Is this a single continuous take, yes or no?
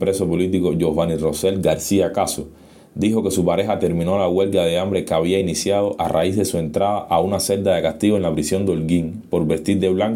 yes